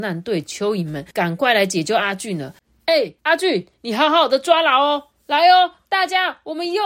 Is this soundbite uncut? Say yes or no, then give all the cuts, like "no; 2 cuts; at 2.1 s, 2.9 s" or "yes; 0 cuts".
no; 2 cuts; at 1.1 s, 3.2 s